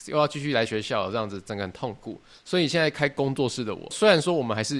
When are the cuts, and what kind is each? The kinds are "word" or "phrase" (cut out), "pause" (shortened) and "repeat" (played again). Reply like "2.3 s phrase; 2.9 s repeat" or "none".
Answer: none